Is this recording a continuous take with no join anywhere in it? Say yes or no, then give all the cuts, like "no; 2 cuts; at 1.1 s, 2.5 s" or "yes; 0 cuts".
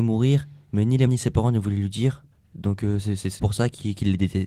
no; 3 cuts; at 1.1 s, 2.3 s, 3.4 s